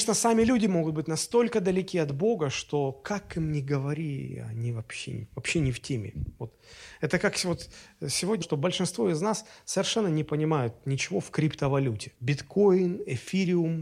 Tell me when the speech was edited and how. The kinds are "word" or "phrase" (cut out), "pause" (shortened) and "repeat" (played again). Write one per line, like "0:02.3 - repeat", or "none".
0:08.4 - phrase
0:12.2 - pause

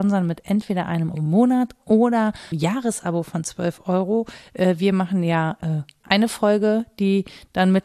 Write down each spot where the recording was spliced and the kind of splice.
0:01.1 - word
0:02.5 - word
0:06.0 - word

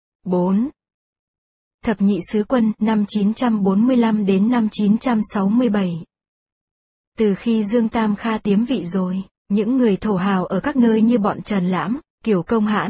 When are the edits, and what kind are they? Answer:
none

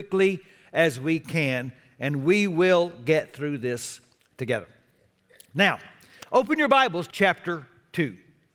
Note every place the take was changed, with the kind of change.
0:07.1 - word

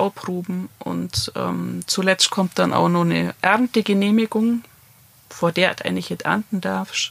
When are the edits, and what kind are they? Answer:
none

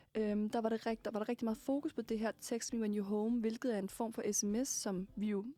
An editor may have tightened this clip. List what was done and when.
none

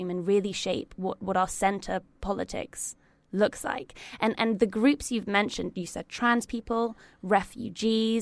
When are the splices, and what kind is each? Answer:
none

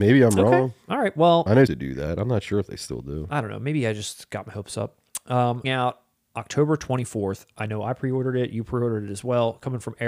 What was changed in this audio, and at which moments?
0:01.7 - phrase
0:05.6 - phrase

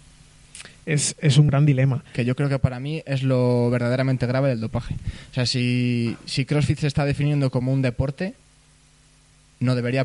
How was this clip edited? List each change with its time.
0:01.5 - phrase

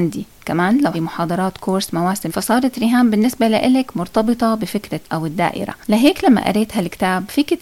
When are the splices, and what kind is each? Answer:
0:00.9 - word
0:02.3 - phrase
0:05.0 - word

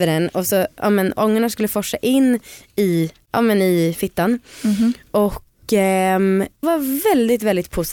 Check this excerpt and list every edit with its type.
0:06.6 - word

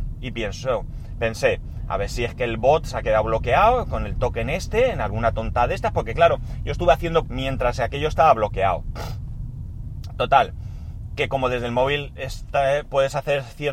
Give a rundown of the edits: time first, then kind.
0:07.2 - word

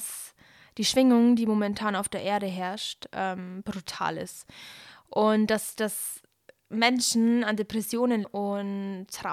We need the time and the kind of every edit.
0:08.2 - word

